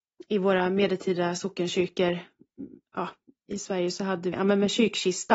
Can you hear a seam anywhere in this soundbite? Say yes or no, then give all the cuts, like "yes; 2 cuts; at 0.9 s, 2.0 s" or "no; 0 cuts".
yes; 2 cuts; at 3.5 s, 4.3 s